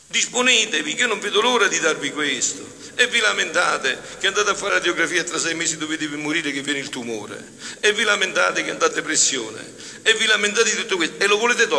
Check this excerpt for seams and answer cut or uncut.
cut